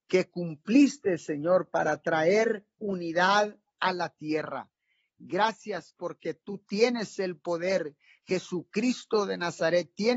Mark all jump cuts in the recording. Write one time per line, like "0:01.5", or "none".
none